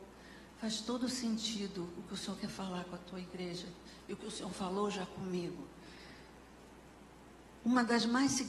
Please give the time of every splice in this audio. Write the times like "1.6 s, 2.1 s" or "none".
none